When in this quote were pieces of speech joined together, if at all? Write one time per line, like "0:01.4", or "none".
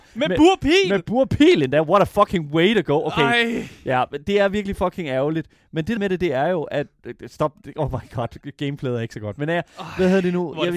0:06.0